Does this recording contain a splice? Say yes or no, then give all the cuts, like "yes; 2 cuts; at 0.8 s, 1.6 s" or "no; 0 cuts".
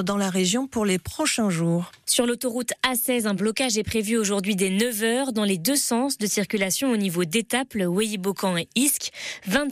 no; 0 cuts